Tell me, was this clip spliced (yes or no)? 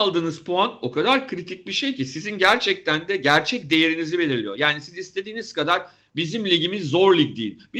no